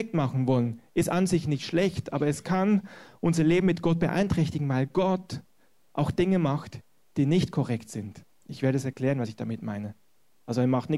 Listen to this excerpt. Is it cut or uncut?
uncut